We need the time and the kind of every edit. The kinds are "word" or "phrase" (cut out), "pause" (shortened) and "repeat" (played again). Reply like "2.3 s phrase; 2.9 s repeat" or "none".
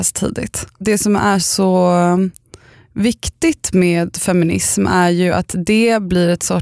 none